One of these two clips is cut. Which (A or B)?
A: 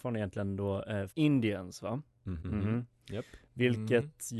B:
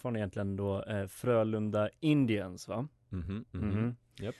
A